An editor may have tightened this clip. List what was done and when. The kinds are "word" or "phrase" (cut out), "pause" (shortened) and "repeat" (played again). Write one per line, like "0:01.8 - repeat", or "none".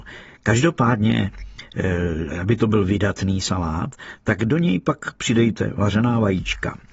none